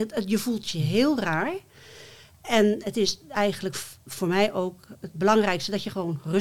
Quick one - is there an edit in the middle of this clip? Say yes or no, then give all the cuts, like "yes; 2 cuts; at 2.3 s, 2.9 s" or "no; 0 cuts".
no; 0 cuts